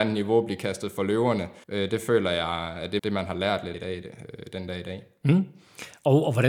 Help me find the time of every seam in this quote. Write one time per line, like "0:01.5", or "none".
0:01.6
0:03.0
0:03.7